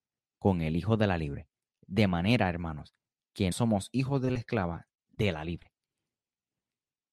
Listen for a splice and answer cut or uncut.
cut